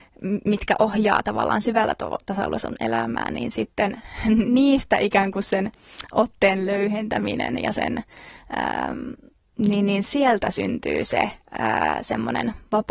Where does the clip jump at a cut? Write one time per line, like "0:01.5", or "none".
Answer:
none